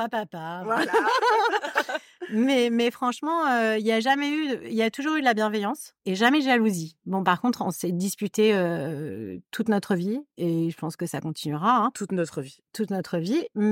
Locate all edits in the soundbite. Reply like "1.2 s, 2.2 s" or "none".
6.0 s

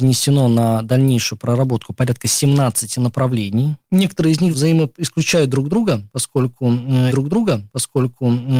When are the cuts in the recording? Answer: 7.1 s

